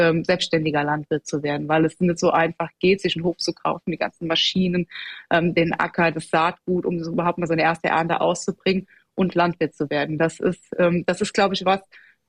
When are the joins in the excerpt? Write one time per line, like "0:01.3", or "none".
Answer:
none